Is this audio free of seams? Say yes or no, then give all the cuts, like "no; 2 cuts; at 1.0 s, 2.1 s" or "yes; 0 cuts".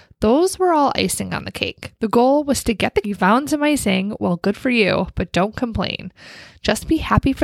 no; 2 cuts; at 2.0 s, 3.0 s